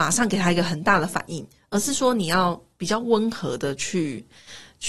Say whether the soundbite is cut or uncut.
uncut